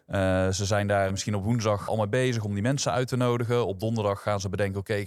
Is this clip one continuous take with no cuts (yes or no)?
no